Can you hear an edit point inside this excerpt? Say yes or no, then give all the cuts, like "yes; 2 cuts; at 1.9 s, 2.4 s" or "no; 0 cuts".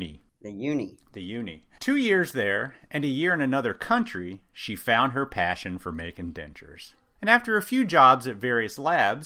no; 0 cuts